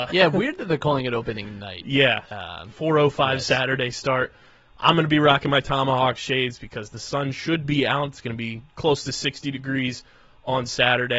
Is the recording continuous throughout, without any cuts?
yes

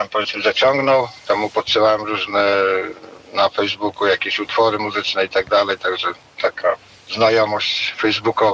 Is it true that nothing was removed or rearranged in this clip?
yes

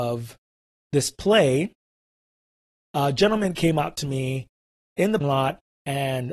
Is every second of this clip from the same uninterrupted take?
no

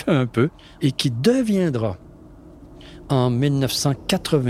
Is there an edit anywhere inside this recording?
no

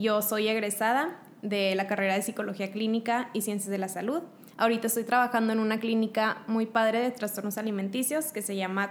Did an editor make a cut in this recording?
yes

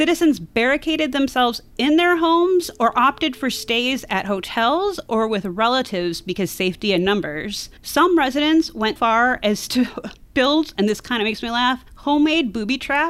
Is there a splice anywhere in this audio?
yes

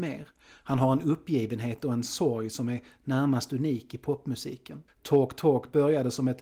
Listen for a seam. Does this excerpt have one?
yes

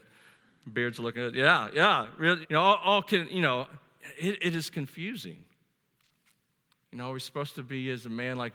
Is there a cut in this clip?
yes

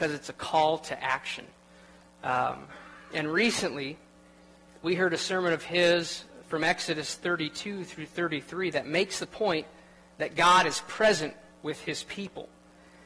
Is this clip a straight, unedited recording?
yes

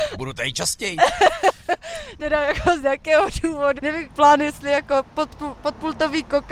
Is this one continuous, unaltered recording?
no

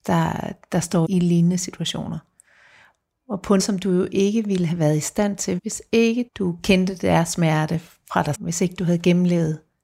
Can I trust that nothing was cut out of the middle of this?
no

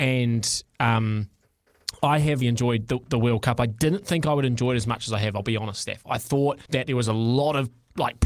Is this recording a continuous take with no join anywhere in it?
no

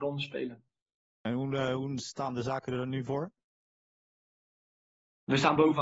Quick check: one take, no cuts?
yes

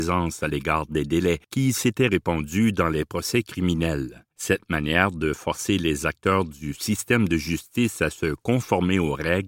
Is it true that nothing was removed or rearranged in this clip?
no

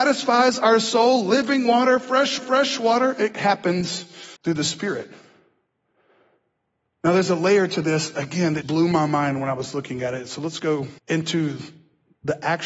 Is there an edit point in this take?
yes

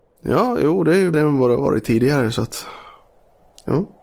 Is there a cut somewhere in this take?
yes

